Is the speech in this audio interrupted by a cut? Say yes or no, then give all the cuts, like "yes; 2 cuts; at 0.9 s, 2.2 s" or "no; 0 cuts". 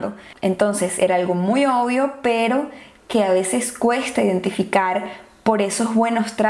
no; 0 cuts